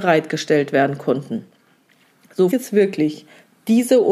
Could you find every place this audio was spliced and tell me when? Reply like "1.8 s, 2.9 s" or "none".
2.5 s